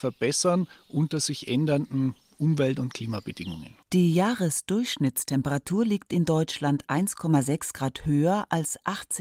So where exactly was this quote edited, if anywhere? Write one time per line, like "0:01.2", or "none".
0:03.8